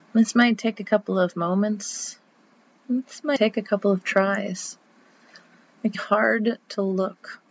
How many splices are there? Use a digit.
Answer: 2